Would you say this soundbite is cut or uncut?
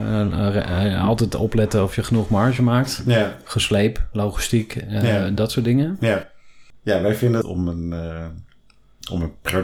cut